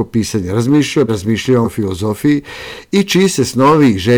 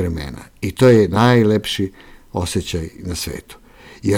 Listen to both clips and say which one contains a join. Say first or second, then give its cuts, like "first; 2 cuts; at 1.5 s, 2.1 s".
first; 2 cuts; at 1.1 s, 1.6 s